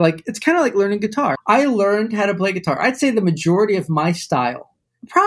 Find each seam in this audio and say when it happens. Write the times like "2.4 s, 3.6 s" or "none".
1.4 s